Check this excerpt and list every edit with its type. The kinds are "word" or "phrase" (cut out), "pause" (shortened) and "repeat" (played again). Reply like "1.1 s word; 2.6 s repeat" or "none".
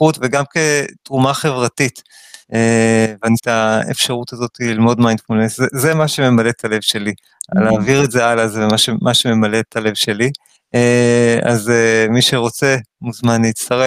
2.4 s pause; 3.4 s phrase; 10.5 s pause

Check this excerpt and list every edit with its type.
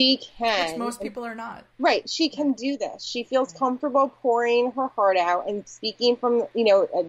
1.7 s pause

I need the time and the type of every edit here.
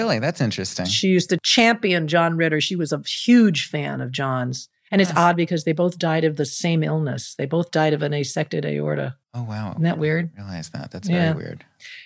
9.2 s pause

